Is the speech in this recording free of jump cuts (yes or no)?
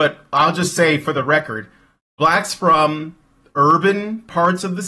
yes